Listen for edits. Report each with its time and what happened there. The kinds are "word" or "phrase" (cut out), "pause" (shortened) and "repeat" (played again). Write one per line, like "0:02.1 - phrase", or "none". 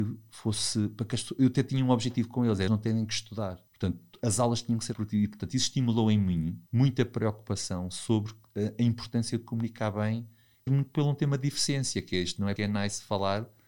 0:02.7 - word
0:03.7 - pause
0:04.9 - word
0:06.7 - pause
0:10.7 - phrase
0:12.6 - word